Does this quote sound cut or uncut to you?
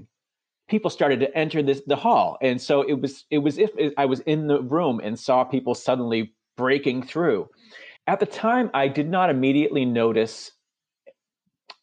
cut